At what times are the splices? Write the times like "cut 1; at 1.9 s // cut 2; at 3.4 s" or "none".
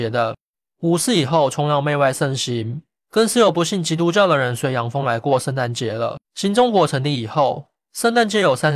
cut 1; at 6.2 s